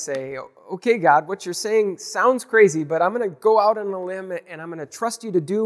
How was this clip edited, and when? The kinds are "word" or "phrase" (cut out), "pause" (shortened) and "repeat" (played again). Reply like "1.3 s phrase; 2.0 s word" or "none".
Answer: none